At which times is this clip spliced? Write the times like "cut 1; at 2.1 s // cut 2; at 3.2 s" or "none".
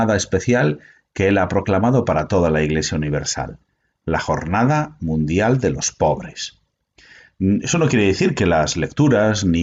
none